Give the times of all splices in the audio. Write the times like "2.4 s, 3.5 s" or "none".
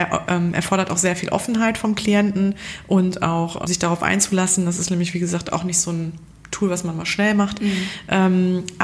3.7 s